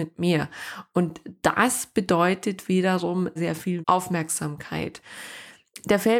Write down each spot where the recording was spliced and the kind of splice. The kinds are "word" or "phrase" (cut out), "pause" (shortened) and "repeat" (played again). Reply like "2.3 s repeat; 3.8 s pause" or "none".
3.4 s word; 3.8 s word

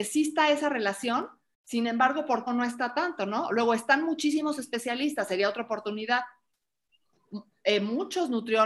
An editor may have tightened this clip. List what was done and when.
2.5 s phrase

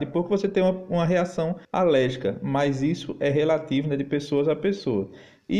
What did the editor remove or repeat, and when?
1.6 s pause

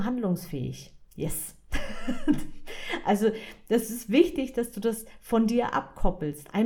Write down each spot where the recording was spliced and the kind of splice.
1.1 s pause

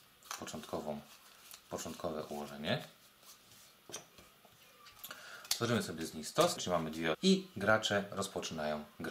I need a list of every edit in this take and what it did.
6.6 s phrase; 7.1 s word

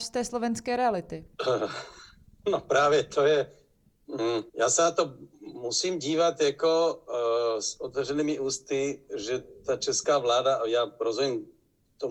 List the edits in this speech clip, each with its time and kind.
1.3 s pause; 4.5 s pause

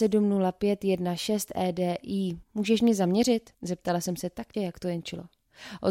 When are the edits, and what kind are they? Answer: 2.4 s pause; 3.5 s pause; 4.5 s word

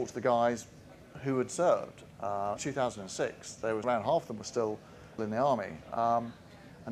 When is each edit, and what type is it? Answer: 2.6 s phrase; 3.8 s word; 5.2 s word

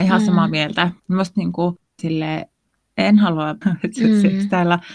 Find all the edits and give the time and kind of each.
1.0 s pause; 2.0 s word; 3.6 s word

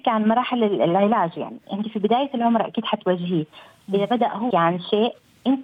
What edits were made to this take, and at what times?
4.5 s word

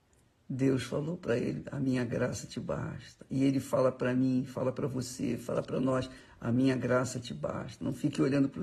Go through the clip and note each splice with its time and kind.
none

